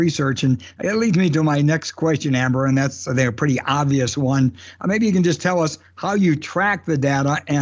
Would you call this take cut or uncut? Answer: uncut